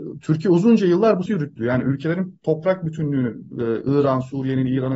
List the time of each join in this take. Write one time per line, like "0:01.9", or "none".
0:01.3